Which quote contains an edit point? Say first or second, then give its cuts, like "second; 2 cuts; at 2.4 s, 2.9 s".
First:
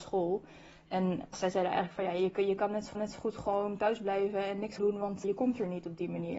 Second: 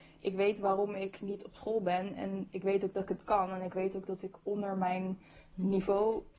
first; 4 cuts; at 1.3 s, 2.9 s, 4.8 s, 5.2 s